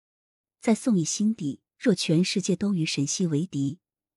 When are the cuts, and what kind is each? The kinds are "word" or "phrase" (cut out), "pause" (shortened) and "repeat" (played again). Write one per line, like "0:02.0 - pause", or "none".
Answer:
0:01.7 - pause